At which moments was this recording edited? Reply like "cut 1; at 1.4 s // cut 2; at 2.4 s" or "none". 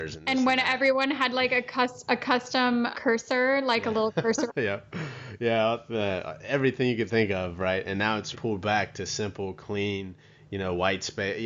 cut 1; at 2.9 s // cut 2; at 4.5 s // cut 3; at 8.3 s